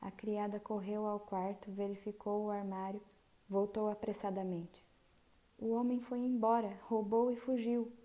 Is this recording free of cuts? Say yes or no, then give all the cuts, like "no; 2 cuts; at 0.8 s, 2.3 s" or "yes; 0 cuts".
yes; 0 cuts